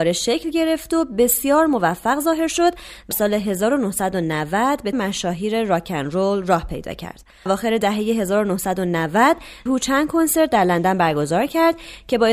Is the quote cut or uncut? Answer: cut